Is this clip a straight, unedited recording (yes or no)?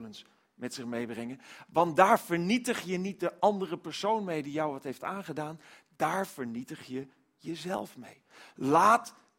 yes